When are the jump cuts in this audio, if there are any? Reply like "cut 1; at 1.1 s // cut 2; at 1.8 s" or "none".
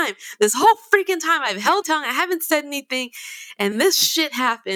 cut 1; at 1.8 s // cut 2; at 3.7 s